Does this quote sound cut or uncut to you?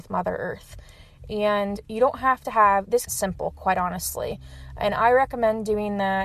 cut